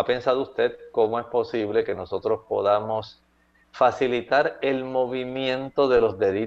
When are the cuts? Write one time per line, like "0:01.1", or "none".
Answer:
none